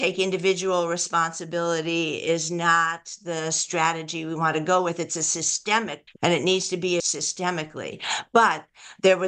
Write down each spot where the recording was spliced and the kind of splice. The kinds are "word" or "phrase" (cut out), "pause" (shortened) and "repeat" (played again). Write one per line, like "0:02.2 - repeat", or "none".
0:06.1 - word
0:07.0 - word